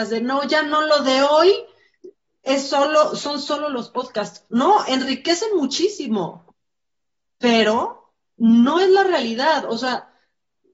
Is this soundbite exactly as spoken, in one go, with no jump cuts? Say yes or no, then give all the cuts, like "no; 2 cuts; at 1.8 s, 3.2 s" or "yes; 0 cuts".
yes; 0 cuts